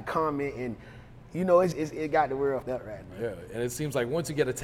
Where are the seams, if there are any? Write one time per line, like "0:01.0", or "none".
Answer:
0:01.7
0:02.6
0:03.0